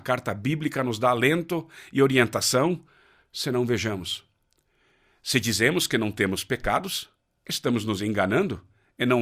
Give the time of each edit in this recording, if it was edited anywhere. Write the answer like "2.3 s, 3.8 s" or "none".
none

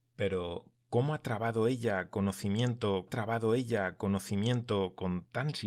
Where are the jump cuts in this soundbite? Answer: 3.1 s

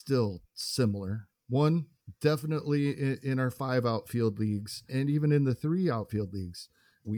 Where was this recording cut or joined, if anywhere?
4.9 s

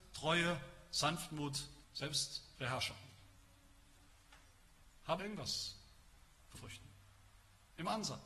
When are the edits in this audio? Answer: 1.8 s, 5.2 s, 6.5 s

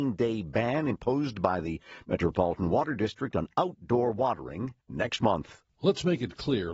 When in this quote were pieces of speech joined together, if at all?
4.8 s, 5.7 s

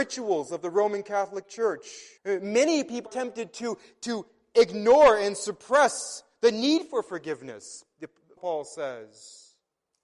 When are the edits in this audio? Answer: 2.2 s, 3.1 s, 8.4 s

